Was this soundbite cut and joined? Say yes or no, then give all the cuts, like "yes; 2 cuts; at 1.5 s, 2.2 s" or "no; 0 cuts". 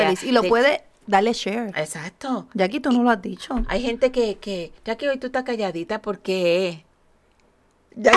yes; 1 cut; at 4.8 s